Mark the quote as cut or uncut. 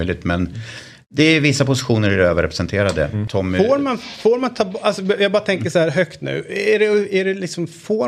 uncut